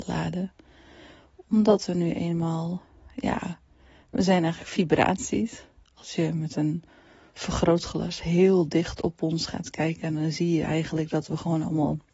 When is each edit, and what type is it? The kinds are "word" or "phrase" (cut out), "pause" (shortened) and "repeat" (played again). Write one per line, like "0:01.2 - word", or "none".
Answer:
none

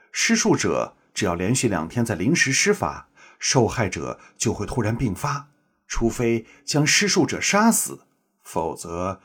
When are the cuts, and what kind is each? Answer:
none

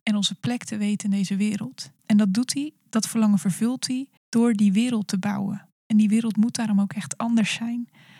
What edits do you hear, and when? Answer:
0:02.0 - pause
0:04.2 - pause

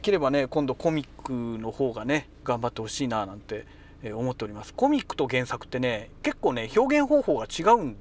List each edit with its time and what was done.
0:06.2 - pause

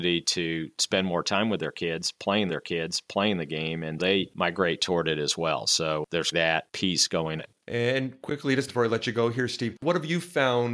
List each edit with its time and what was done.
0:02.5 - repeat
0:04.0 - word
0:06.3 - word
0:07.4 - phrase
0:08.7 - phrase

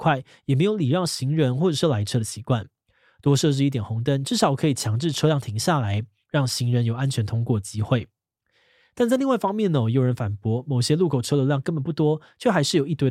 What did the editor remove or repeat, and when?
none

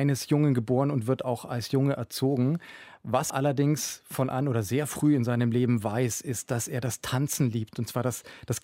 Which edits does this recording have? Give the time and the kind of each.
0:03.3 - word
0:04.3 - word

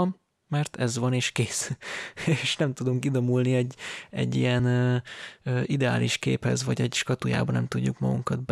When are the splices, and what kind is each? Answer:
none

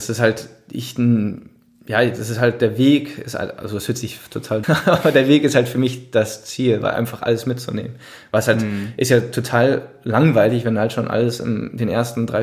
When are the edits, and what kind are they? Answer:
0:04.6 - phrase

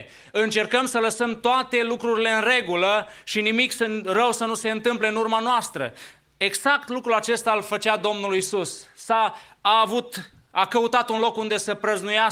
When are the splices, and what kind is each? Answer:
none

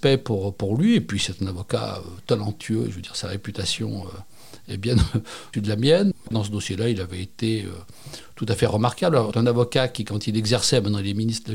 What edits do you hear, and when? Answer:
0:05.5 - word
0:09.3 - word

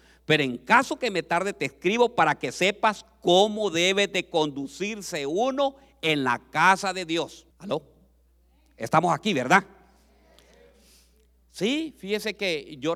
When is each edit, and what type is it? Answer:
0:07.5 - pause

